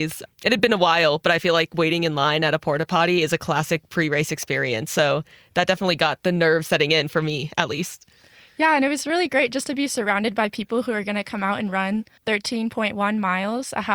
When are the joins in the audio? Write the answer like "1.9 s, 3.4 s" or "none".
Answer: none